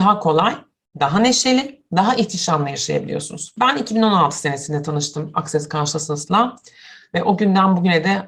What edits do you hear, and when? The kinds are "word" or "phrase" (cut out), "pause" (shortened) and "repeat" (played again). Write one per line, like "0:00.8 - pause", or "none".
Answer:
none

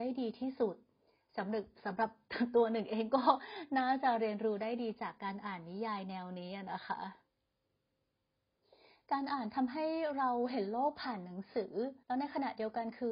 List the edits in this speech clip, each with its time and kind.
0:12.0 - pause

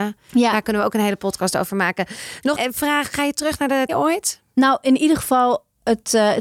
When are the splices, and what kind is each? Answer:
0:02.6 - word
0:03.9 - word

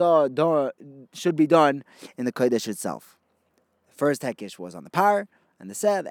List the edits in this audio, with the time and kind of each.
none

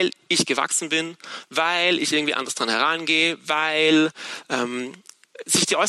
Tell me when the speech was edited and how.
none

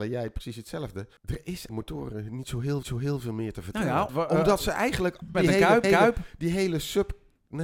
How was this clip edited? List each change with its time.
0:01.2 - pause
0:01.7 - phrase
0:02.8 - repeat
0:04.1 - word
0:05.3 - word
0:05.8 - repeat

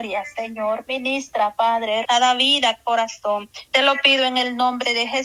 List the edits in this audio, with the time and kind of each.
0:02.0 - word
0:02.8 - word
0:03.7 - pause

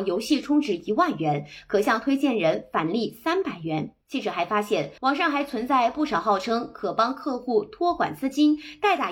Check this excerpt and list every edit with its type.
0:04.0 - pause
0:05.0 - pause

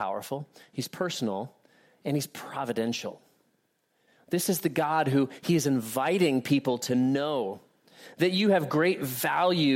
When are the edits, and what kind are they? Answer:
none

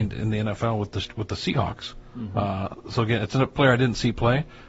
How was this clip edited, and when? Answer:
none

